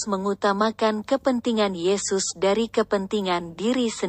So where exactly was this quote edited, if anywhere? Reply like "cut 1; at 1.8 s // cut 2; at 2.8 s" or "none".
none